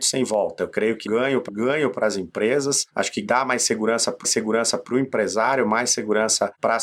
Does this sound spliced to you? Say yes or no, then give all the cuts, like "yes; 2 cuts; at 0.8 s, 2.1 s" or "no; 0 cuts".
yes; 3 cuts; at 1.1 s, 1.5 s, 4.2 s